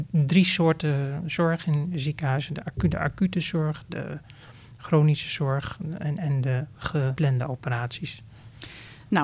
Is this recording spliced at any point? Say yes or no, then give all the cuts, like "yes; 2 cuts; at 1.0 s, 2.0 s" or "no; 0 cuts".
no; 0 cuts